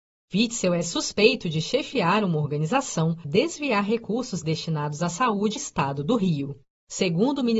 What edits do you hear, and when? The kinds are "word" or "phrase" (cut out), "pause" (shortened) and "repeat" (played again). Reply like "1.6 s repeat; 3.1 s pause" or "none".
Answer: 3.2 s word; 5.6 s word